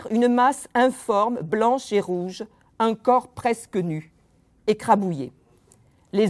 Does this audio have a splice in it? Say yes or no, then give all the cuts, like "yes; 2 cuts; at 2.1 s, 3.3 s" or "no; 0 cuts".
no; 0 cuts